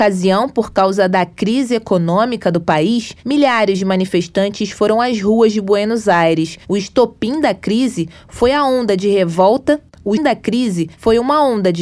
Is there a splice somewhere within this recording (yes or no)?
yes